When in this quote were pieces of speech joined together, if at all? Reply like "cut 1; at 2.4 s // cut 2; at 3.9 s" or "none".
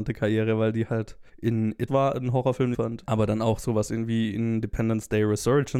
cut 1; at 1.3 s // cut 2; at 1.9 s // cut 3; at 2.7 s